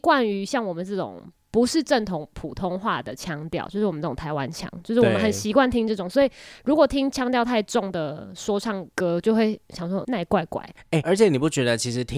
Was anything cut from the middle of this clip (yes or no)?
yes